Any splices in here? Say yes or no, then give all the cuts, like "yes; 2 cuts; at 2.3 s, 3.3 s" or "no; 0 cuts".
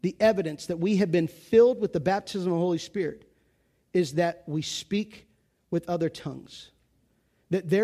no; 0 cuts